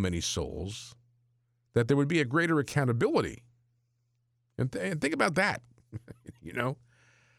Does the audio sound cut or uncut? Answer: uncut